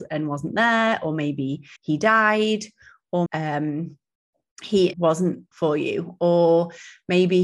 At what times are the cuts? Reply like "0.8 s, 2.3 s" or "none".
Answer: 1.8 s, 3.3 s, 4.9 s, 5.5 s